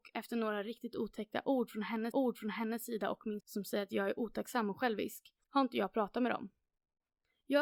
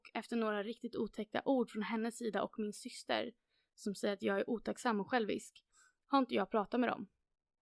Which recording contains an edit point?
first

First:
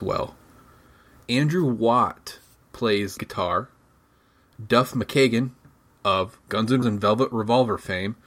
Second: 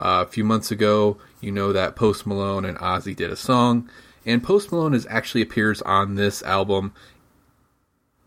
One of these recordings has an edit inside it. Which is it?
first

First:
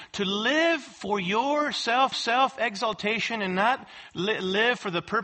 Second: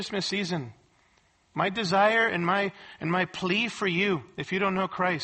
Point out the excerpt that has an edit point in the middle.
first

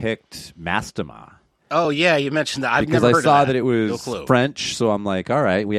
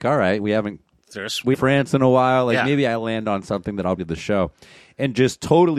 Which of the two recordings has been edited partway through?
second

